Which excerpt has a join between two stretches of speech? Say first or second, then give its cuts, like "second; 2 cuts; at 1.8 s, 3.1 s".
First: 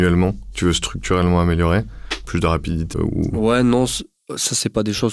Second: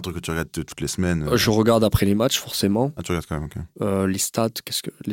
first; 1 cut; at 2.9 s